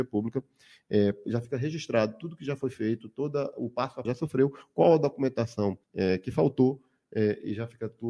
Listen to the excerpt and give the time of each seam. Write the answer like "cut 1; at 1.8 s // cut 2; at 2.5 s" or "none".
cut 1; at 4.0 s // cut 2; at 5.8 s